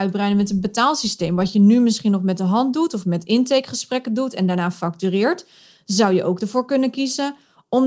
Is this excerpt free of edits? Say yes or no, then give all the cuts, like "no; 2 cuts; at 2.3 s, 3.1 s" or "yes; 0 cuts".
yes; 0 cuts